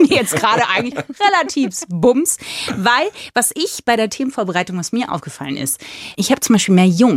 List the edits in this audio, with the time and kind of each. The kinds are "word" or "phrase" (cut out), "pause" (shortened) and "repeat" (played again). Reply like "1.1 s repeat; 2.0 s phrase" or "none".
none